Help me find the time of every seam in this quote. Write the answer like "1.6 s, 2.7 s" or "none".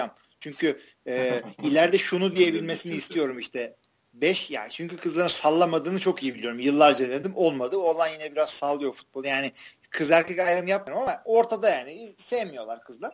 none